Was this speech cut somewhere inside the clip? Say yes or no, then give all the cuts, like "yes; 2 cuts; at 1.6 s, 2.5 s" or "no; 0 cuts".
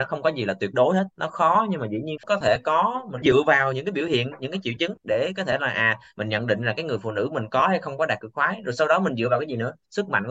yes; 2 cuts; at 2.2 s, 3.2 s